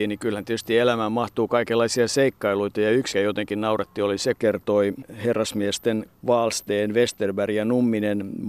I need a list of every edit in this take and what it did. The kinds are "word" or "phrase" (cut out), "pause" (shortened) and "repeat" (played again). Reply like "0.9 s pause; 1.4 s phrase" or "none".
3.1 s word; 4.4 s phrase; 6.1 s word